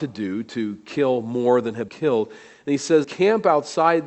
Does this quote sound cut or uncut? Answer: cut